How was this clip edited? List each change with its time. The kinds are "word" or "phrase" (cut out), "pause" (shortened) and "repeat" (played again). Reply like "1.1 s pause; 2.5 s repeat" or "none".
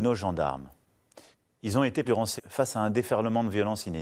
1.3 s pause; 2.0 s word; 2.4 s word